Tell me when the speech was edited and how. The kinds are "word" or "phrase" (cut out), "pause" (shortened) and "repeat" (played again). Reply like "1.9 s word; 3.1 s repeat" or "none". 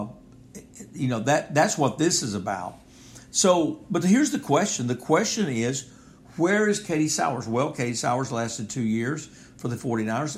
none